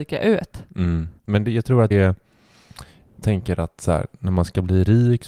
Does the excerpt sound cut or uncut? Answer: cut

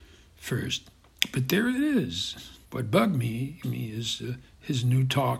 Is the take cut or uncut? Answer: cut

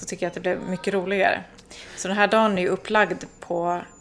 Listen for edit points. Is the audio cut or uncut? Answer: uncut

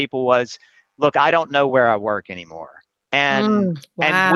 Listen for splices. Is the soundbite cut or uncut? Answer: uncut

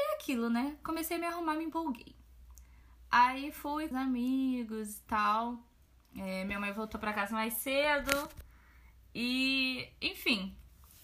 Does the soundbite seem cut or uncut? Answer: cut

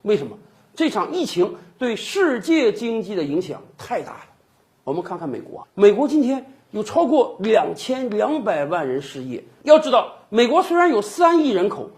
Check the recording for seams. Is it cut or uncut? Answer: cut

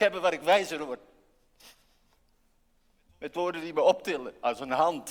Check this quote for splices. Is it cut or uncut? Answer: uncut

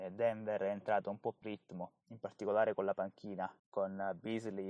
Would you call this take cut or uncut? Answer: cut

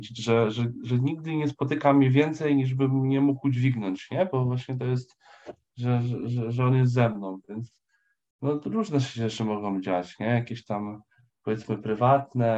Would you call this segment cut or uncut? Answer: uncut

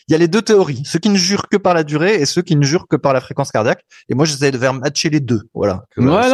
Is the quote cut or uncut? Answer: uncut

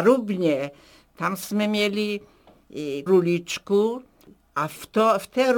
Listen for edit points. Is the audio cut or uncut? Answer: cut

